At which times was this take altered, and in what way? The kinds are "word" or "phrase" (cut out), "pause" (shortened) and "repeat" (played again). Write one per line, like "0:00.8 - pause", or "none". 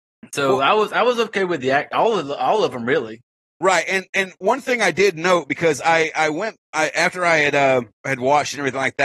none